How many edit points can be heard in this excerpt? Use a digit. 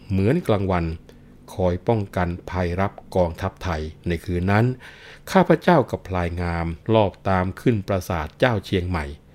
2